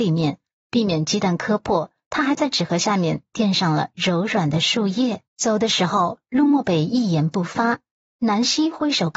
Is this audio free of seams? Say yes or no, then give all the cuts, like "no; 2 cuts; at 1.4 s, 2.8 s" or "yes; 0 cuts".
no; 1 cut; at 5.3 s